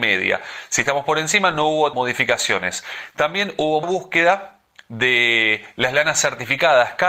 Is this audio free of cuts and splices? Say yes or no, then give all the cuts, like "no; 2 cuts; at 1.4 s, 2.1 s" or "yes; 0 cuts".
no; 2 cuts; at 1.9 s, 3.8 s